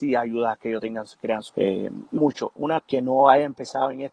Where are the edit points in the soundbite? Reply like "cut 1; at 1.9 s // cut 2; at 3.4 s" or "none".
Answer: cut 1; at 1.5 s // cut 2; at 2.2 s // cut 3; at 2.8 s